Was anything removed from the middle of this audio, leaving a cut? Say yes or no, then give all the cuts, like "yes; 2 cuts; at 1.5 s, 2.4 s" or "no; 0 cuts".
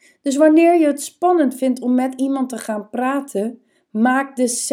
no; 0 cuts